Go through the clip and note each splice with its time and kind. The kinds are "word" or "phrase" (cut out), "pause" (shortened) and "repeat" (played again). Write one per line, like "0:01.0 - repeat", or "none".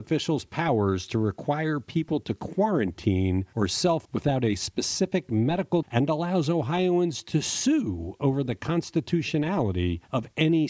0:04.0 - word
0:05.8 - word